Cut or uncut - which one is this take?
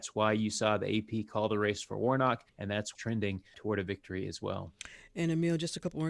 cut